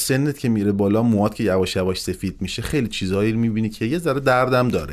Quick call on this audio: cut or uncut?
uncut